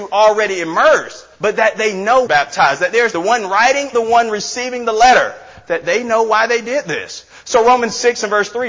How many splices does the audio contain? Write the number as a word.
four